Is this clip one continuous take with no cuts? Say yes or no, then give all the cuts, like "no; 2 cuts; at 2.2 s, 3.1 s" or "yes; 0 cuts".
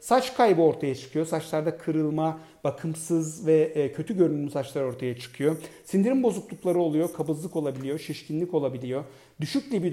yes; 0 cuts